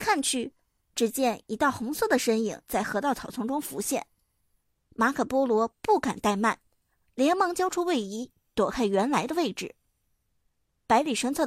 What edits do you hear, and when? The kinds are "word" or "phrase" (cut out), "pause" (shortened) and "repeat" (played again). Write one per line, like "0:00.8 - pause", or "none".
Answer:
0:02.6 - pause